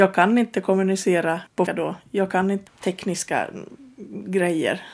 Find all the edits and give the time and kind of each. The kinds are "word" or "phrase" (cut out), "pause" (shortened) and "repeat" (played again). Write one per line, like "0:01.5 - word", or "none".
0:01.7 - word
0:02.7 - word